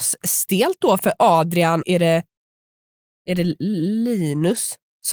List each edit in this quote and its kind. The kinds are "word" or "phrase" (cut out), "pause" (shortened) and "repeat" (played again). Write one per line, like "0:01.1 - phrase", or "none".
0:01.0 - word
0:01.8 - word